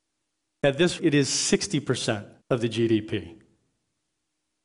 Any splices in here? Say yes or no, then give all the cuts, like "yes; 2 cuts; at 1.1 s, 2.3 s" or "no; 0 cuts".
yes; 2 cuts; at 1.0 s, 2.4 s